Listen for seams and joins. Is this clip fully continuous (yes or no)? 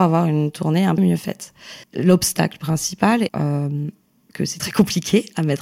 no